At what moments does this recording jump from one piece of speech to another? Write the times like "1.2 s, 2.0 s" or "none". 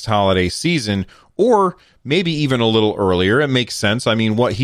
none